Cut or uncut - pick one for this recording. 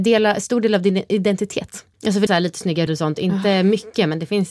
cut